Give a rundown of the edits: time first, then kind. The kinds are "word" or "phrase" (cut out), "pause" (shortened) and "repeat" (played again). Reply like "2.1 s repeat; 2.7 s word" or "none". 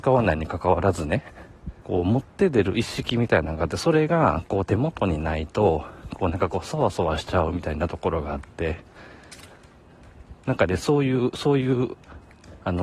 1.8 s pause